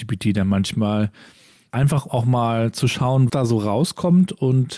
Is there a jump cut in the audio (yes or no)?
yes